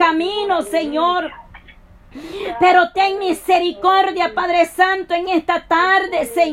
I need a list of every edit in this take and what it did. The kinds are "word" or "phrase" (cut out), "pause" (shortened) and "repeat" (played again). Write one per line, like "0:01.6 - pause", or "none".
none